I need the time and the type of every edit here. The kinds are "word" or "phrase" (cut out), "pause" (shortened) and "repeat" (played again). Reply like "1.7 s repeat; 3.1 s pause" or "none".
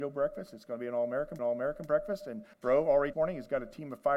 1.4 s repeat; 2.5 s pause; 3.1 s phrase

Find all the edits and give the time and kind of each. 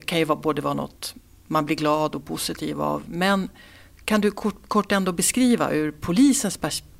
none

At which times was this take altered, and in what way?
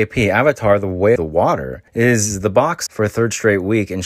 1.2 s word; 1.9 s pause; 2.9 s phrase

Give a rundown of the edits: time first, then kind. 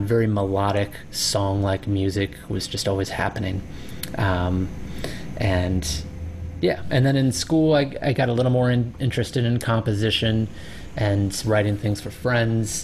none

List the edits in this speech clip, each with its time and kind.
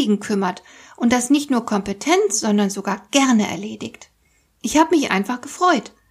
none

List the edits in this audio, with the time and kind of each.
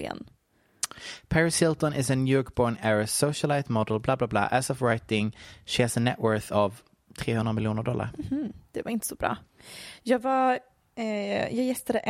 none

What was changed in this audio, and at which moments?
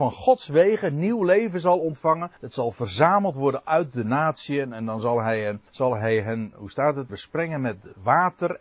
2.4 s pause; 5.7 s pause; 7.1 s word

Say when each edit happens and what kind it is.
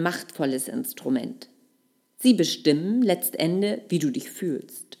none

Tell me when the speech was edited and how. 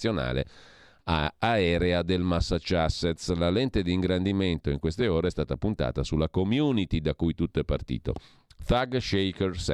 none

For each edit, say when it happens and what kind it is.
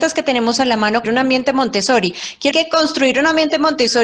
1.0 s word; 2.5 s word

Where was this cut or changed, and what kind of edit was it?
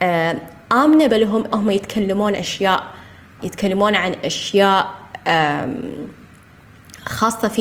1.1 s word; 1.5 s word; 2.3 s word; 3.4 s word

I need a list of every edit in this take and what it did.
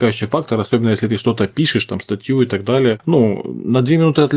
none

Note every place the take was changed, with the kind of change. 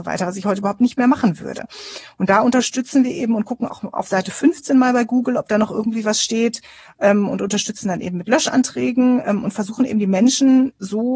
none

